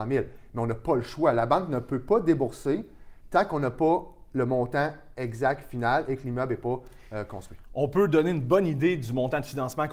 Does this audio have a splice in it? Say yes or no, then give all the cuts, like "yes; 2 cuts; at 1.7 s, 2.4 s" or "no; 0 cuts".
no; 0 cuts